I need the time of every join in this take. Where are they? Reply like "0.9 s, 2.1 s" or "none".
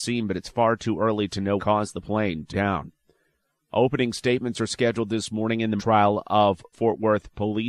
1.6 s, 2.5 s, 5.8 s, 6.7 s